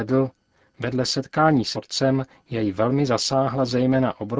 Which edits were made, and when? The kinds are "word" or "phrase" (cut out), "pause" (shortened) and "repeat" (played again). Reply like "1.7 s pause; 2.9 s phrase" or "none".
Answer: 1.7 s word